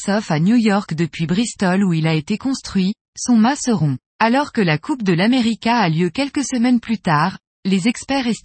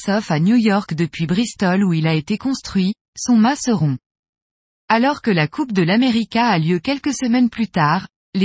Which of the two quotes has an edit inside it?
first; 1 cut; at 4.1 s

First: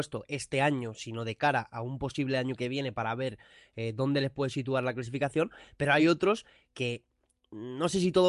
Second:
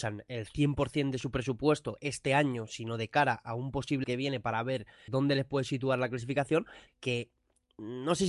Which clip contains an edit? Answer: second; 3 cuts; at 4.0 s, 5.1 s, 6.9 s

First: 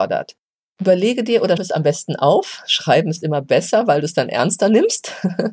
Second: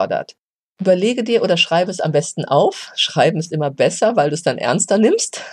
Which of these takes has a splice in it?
first; 1 cut; at 1.6 s

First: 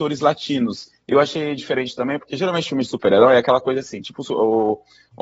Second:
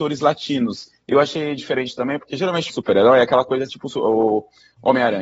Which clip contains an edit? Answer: second; 2 cuts; at 2.7 s, 3.7 s

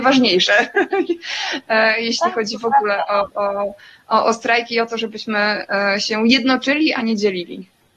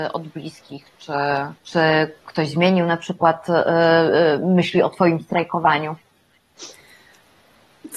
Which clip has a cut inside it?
second; 1 cut; at 1.6 s

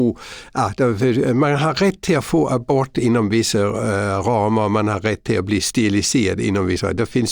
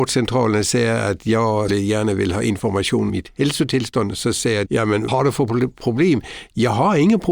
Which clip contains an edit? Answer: second; 4 cuts; at 1.7 s, 3.1 s, 4.6 s, 5.1 s

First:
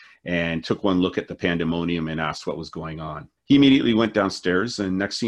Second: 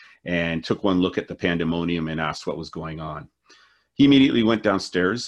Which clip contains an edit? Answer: first; 1 cut; at 3.4 s

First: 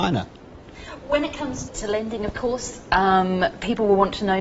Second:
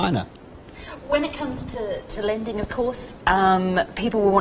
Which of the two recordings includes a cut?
first; 1 cut; at 1.7 s

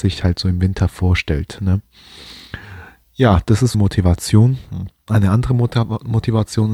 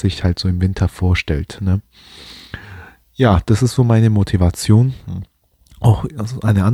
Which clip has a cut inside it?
first; 2 cuts; at 3.7 s, 5.1 s

